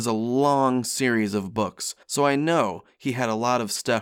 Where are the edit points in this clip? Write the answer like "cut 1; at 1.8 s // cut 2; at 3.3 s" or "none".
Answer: cut 1; at 2.0 s